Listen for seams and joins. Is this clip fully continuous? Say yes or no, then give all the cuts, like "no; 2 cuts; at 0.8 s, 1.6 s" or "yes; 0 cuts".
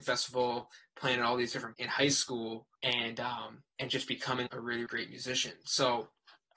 no; 5 cuts; at 1.7 s, 2.8 s, 3.7 s, 4.5 s, 4.9 s